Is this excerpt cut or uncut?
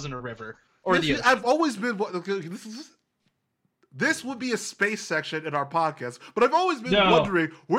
uncut